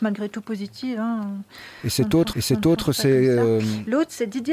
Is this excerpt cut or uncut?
cut